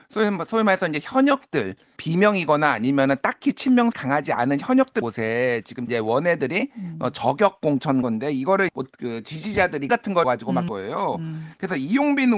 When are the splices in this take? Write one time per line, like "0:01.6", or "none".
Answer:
0:02.0
0:03.9
0:05.0
0:05.9
0:08.0
0:08.7
0:09.9
0:10.2
0:10.7